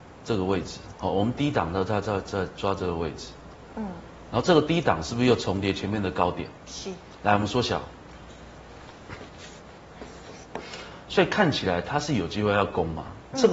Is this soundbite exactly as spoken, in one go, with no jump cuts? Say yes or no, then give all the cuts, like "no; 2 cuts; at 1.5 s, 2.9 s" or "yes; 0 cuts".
no; 2 cuts; at 0.9 s, 6.5 s